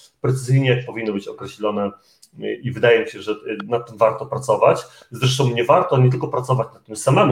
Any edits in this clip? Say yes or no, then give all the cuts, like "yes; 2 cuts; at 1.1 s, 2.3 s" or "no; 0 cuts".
no; 0 cuts